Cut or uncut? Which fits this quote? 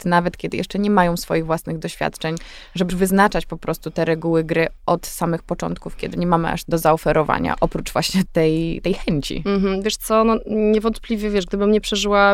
cut